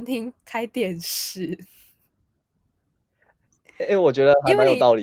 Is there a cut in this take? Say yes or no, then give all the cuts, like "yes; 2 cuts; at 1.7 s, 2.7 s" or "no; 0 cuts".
no; 0 cuts